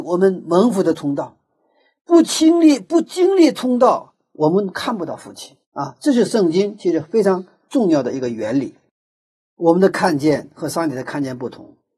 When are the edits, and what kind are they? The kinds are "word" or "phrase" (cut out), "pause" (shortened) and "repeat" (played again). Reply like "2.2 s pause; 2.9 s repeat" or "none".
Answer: 5.6 s pause